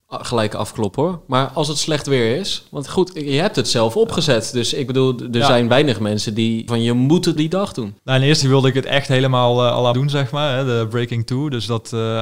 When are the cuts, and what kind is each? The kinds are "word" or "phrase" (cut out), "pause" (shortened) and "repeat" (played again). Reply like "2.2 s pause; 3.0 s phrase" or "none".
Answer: 6.7 s word; 7.4 s word; 8.0 s pause; 8.4 s word; 9.9 s word